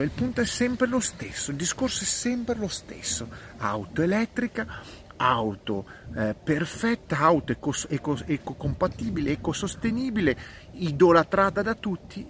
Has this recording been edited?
no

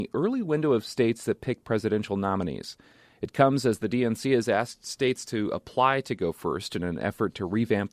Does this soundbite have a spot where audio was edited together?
no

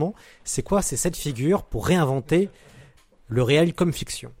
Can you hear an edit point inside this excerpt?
no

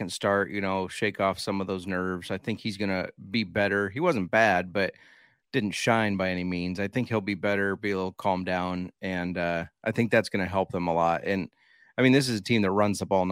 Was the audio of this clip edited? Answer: no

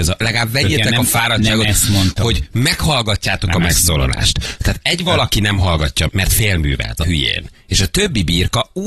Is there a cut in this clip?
yes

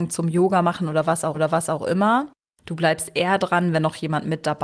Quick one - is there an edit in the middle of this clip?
yes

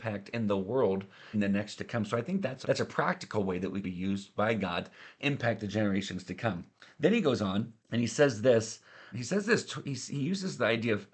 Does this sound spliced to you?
yes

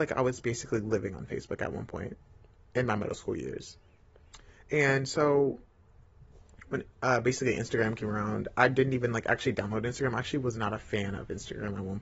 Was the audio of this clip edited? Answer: no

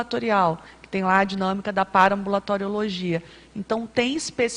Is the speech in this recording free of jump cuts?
yes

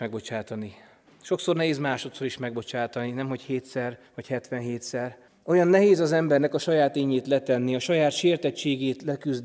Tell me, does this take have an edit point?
yes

